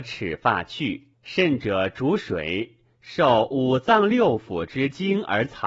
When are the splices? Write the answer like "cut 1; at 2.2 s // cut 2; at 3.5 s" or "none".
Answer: cut 1; at 1.1 s